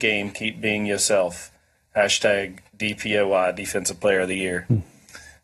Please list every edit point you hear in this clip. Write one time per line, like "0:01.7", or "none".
none